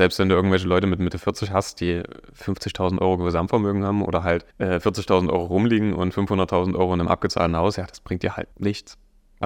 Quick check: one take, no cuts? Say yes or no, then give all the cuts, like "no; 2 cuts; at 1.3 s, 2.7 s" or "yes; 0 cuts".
no; 2 cuts; at 4.5 s, 8.5 s